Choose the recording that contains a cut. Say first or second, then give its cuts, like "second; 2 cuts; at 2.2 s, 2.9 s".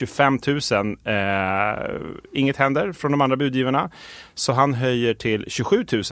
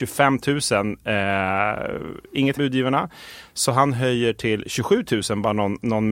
second; 1 cut; at 2.6 s